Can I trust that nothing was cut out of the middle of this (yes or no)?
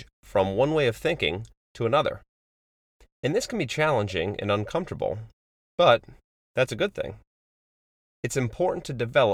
yes